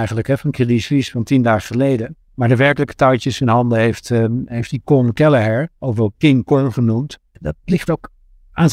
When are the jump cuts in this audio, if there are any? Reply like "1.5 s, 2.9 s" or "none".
2.2 s, 5.8 s, 7.3 s